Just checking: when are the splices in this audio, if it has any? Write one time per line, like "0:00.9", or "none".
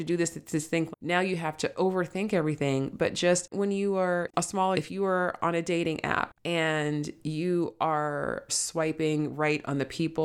0:00.9
0:03.5
0:04.7
0:06.4
0:08.5